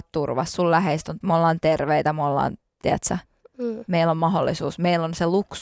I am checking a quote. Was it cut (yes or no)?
yes